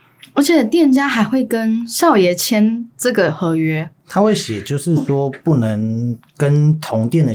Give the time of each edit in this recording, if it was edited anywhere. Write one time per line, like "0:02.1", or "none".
0:04.0